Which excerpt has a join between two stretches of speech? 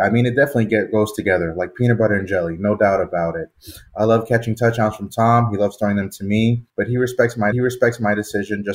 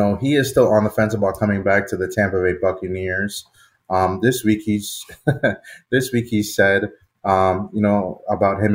first; 2 cuts; at 6.7 s, 7.5 s

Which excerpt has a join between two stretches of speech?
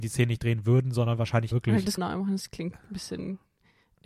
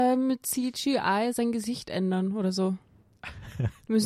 first; 2 cuts; at 1.5 s, 2.0 s

